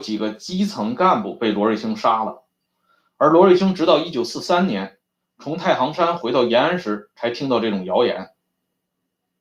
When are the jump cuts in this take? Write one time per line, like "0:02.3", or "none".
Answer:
none